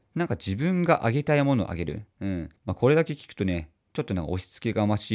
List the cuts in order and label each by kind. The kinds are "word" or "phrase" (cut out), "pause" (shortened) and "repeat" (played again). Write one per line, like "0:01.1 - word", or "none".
0:02.1 - pause
0:02.6 - pause